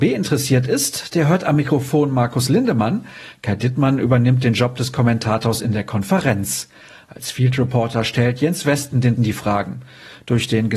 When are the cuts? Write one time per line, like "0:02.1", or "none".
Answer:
0:09.2